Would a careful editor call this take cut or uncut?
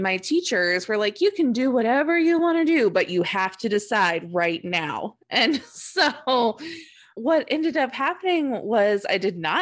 uncut